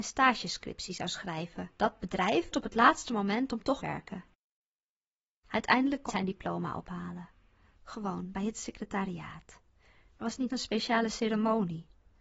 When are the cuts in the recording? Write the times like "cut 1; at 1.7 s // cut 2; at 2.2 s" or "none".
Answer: cut 1; at 1.7 s // cut 2; at 2.5 s // cut 3; at 3.8 s // cut 4; at 6.1 s // cut 5; at 10.5 s